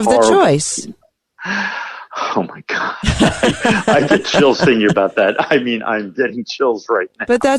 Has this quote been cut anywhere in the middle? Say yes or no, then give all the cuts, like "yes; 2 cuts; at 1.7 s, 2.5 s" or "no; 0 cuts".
no; 0 cuts